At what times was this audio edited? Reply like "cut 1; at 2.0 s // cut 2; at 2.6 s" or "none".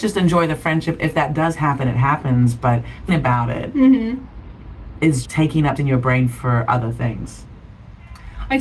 cut 1; at 3.1 s // cut 2; at 5.2 s // cut 3; at 5.8 s